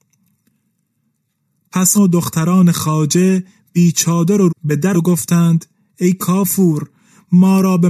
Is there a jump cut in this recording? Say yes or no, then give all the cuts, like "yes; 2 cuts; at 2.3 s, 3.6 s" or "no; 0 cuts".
yes; 3 cuts; at 1.9 s, 4.5 s, 4.9 s